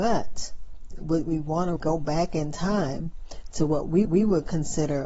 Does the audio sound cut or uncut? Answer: cut